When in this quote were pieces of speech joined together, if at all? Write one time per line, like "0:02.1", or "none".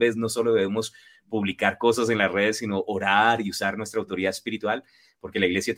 none